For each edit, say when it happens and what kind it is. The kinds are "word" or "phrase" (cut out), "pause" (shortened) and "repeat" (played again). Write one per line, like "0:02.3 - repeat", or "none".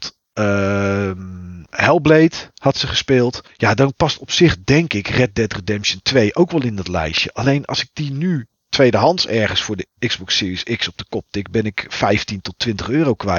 0:02.5 - pause
0:03.5 - pause
0:10.0 - pause